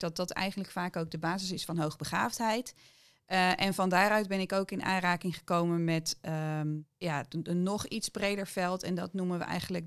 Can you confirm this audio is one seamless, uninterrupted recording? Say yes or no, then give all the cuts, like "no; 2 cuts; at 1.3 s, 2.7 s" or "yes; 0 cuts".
no; 1 cut; at 6.9 s